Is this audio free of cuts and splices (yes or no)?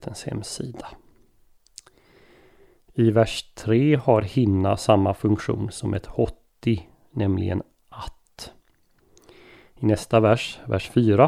yes